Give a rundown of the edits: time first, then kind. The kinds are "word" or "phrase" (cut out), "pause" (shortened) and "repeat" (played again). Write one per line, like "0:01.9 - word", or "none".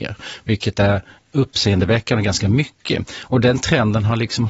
0:01.2 - word